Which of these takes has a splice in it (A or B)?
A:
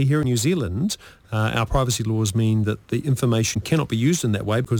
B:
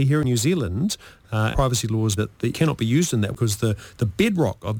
B